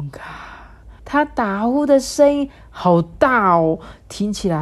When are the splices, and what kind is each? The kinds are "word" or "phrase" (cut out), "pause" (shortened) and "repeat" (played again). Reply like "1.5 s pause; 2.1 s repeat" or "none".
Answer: 1.0 s pause